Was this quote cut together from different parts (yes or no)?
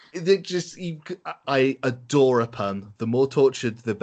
yes